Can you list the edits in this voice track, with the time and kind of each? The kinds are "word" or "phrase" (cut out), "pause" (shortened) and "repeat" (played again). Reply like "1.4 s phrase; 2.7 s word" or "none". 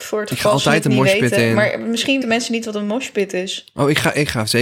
2.2 s word

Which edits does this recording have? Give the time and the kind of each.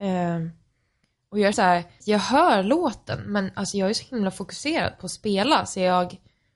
1.5 s word; 2.0 s word

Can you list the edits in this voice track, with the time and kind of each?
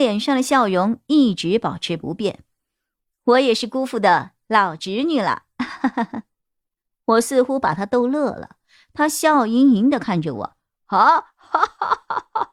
none

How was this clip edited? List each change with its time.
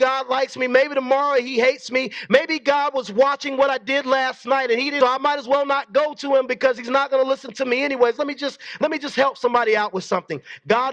5.0 s phrase

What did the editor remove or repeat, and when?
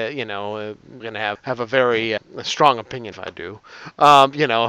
1.0 s word; 1.4 s word; 2.2 s word; 3.1 s word

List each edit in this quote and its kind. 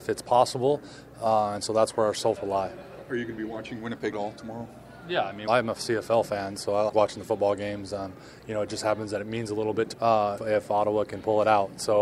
2.4 s word; 4.1 s word; 5.5 s word; 6.9 s word; 9.9 s word; 10.4 s word

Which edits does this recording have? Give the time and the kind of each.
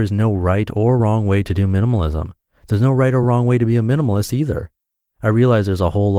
none

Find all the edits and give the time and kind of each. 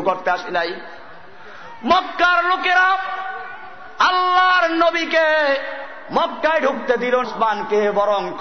7.2 s word

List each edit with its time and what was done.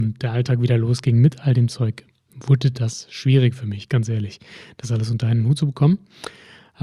none

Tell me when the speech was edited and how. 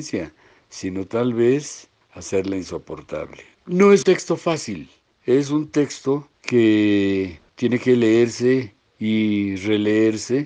4.0 s word

